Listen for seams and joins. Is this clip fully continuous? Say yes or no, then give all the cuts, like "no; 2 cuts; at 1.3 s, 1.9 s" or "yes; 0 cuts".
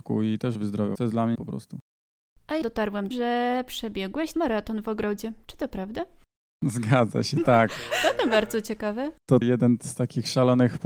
no; 6 cuts; at 1.0 s, 1.4 s, 2.6 s, 3.1 s, 4.3 s, 9.4 s